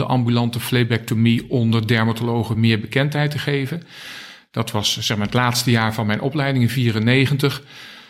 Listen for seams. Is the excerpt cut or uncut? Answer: uncut